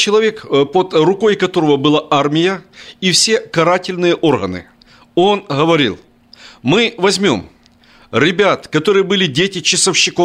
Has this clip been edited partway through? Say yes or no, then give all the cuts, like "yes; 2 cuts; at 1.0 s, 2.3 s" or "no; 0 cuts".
no; 0 cuts